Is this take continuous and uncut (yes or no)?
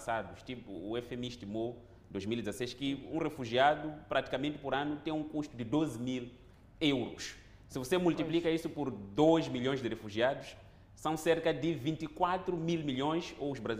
yes